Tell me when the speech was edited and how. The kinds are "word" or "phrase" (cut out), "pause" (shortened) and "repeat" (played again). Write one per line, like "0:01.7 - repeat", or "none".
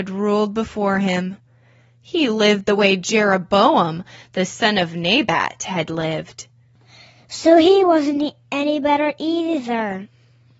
none